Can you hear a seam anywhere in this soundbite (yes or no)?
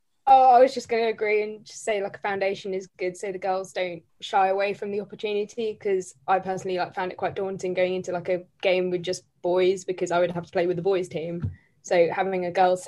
yes